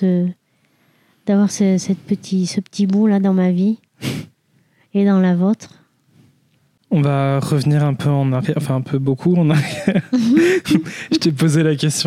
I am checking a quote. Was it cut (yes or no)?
no